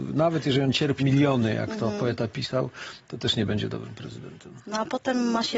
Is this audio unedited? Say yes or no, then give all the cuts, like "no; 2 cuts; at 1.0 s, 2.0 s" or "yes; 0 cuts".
no; 1 cut; at 1.0 s